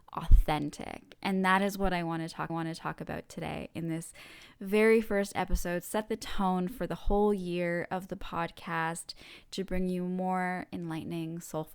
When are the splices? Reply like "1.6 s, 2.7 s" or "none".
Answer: 2.5 s